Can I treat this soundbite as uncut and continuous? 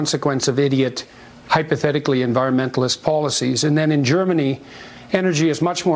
yes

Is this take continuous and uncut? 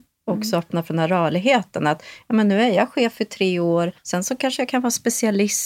no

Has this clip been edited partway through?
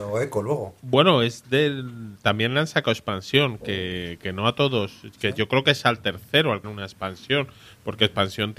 yes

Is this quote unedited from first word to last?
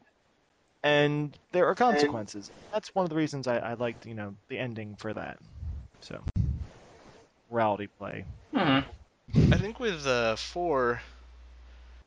no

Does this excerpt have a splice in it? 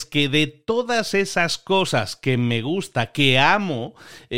no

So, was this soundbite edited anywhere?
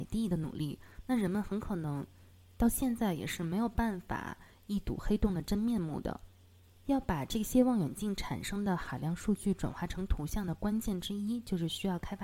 no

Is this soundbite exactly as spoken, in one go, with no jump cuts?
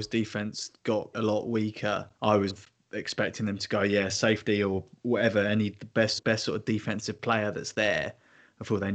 no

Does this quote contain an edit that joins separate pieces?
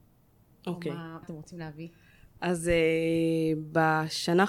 yes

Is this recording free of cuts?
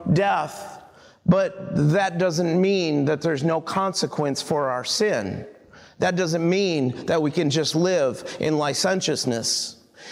yes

